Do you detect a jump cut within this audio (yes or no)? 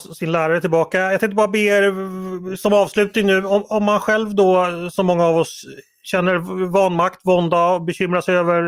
no